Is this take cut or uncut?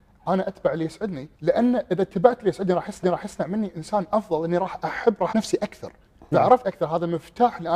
cut